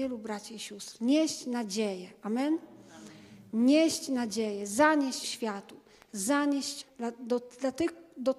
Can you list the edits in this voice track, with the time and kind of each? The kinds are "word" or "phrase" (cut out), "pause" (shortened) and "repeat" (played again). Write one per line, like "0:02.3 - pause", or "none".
0:05.2 - word
0:06.8 - word